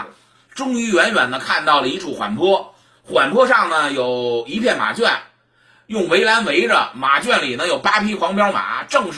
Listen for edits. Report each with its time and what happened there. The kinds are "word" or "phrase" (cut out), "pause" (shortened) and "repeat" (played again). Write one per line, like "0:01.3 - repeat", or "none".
none